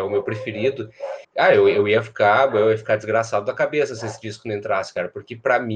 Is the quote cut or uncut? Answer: cut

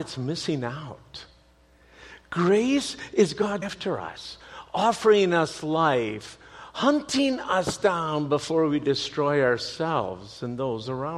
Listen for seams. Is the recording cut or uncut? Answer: cut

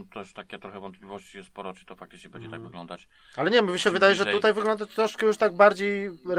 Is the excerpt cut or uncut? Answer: uncut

